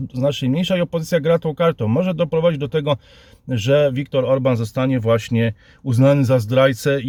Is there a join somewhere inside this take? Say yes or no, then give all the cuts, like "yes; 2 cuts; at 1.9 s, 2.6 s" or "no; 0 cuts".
no; 0 cuts